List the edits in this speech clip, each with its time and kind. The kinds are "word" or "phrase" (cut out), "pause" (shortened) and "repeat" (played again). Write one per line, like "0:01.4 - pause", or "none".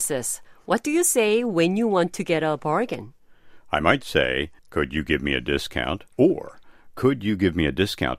0:04.6 - pause
0:06.1 - pause